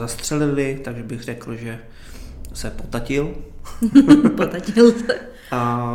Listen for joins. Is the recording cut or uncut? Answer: uncut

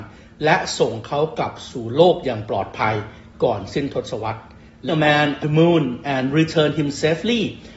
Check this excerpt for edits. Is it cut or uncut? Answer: cut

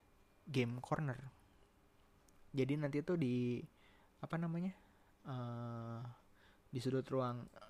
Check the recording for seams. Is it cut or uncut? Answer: uncut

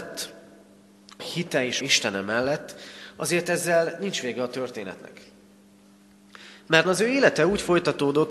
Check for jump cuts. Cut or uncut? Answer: cut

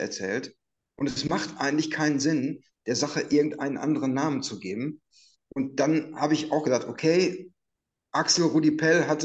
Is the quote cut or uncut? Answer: uncut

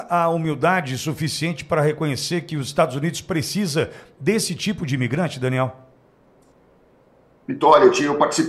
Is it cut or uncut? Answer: uncut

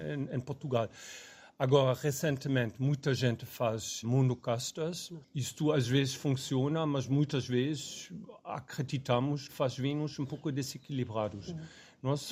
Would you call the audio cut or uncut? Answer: cut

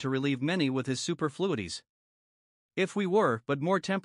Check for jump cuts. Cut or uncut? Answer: uncut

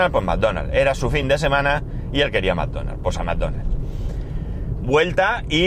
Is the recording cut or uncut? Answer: uncut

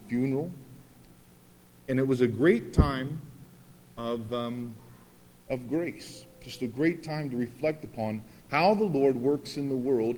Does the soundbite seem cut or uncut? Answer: uncut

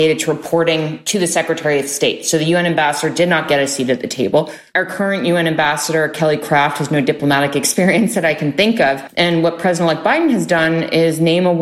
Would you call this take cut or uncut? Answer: uncut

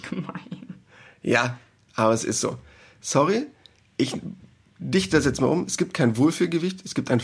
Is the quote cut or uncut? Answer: uncut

